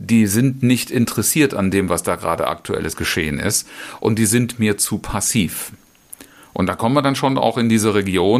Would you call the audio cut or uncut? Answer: uncut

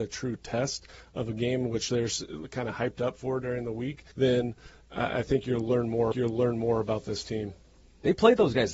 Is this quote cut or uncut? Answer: cut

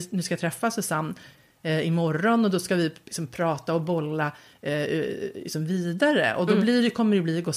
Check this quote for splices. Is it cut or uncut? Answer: uncut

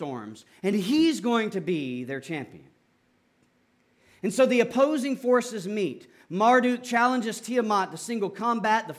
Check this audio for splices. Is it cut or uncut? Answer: uncut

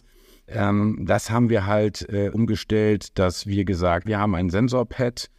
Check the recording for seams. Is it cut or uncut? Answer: cut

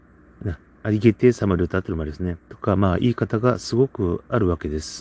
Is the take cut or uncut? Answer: cut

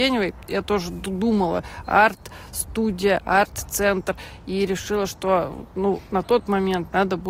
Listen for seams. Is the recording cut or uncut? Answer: uncut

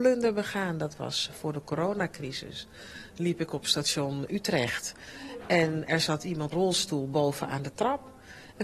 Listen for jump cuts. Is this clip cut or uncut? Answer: cut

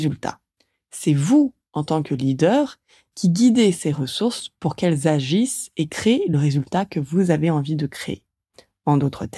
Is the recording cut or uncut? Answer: uncut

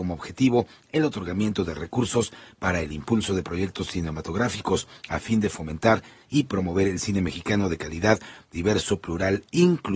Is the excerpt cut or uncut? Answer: uncut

